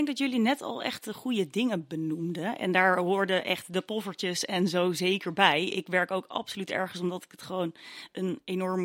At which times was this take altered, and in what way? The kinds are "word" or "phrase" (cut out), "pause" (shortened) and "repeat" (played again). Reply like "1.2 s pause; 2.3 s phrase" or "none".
none